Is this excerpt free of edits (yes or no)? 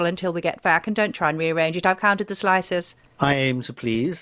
yes